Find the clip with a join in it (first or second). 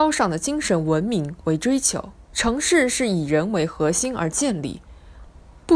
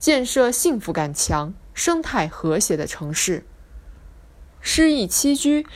first